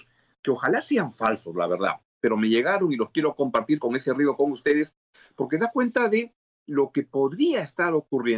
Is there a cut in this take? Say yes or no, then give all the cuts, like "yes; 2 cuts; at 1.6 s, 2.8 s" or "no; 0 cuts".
no; 0 cuts